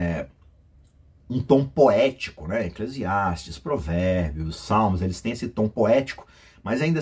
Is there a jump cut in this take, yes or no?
no